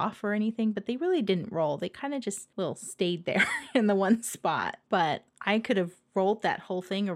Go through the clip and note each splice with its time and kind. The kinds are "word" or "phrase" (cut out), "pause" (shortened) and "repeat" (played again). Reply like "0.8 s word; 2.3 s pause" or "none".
none